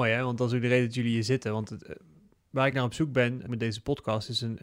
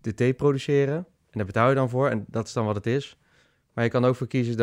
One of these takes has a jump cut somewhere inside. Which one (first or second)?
first